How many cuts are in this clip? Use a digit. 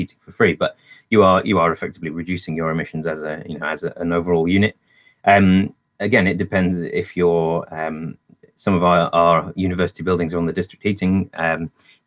0